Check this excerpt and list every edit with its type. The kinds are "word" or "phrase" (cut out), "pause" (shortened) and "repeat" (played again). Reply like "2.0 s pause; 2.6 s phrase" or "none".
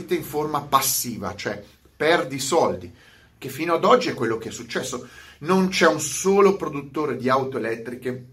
none